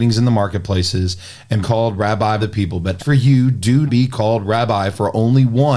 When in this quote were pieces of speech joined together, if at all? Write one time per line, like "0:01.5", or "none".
0:01.6
0:02.4
0:03.0
0:03.9